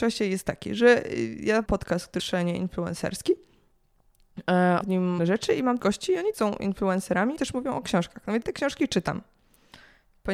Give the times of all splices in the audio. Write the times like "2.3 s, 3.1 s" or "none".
1.7 s, 2.2 s, 4.8 s, 5.2 s, 5.8 s, 6.3 s, 7.4 s, 8.4 s